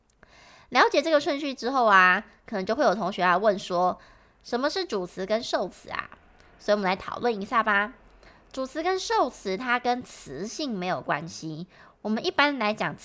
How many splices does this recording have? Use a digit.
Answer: 0